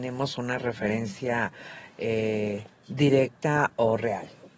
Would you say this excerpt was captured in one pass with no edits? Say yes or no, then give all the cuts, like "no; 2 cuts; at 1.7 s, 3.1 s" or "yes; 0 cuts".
yes; 0 cuts